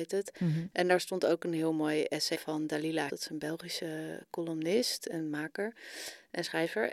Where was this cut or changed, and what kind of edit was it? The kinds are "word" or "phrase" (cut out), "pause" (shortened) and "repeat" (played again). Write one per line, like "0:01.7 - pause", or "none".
0:02.3 - word
0:03.1 - word